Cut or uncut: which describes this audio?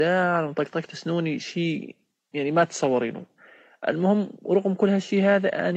uncut